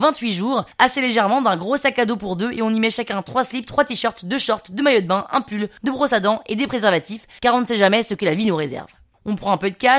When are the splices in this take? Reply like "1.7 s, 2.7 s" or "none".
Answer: none